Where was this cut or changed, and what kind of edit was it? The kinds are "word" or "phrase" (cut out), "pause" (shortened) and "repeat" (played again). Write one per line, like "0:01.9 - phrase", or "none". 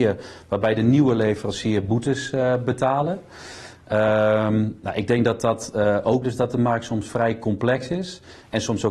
0:06.2 - word